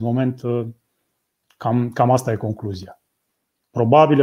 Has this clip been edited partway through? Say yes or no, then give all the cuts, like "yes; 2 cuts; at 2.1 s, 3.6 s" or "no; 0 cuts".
no; 0 cuts